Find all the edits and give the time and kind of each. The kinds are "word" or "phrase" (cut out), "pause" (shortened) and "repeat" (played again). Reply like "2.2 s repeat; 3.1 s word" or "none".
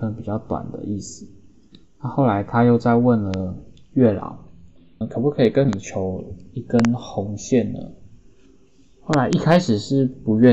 5.0 s word